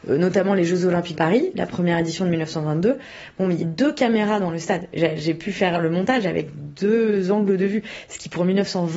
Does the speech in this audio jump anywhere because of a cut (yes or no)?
yes